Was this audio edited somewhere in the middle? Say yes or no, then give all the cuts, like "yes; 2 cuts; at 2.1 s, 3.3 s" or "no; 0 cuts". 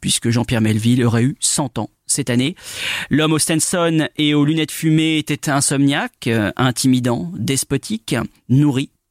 no; 0 cuts